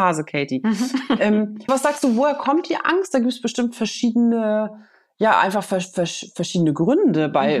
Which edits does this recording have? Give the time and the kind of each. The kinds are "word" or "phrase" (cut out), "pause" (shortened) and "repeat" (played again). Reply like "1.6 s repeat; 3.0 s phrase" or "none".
1.7 s word